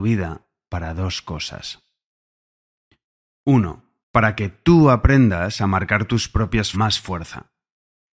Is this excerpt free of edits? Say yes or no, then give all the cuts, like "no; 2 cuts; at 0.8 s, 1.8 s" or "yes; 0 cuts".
no; 2 cuts; at 4.0 s, 6.7 s